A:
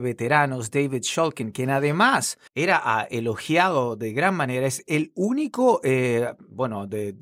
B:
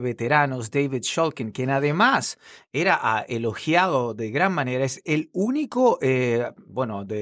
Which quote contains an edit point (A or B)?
A